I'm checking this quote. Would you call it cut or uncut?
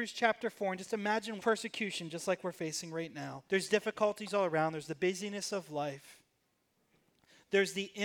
cut